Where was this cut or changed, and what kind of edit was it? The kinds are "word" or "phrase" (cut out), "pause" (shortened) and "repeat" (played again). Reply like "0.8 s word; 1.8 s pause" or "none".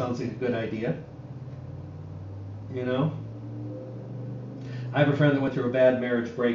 none